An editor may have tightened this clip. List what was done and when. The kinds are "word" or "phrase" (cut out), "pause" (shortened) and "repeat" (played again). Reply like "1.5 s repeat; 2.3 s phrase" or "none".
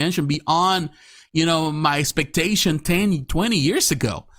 none